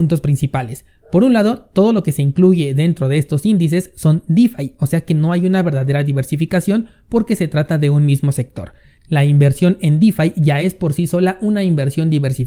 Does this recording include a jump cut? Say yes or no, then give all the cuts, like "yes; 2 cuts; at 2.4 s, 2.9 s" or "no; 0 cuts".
no; 0 cuts